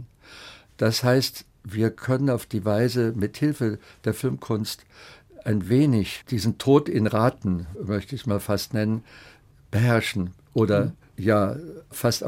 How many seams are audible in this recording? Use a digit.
0